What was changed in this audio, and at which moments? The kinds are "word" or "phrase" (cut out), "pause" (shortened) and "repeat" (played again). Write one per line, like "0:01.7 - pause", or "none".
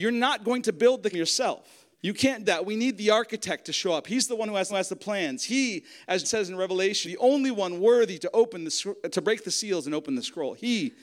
0:01.1 - word
0:01.9 - pause
0:02.5 - word
0:04.7 - repeat
0:06.2 - word
0:07.0 - word